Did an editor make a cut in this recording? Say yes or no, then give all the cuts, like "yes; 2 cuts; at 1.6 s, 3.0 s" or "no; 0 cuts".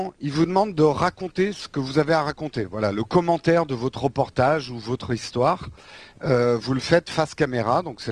no; 0 cuts